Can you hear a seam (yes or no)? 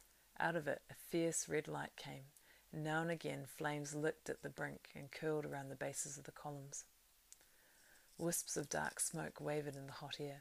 no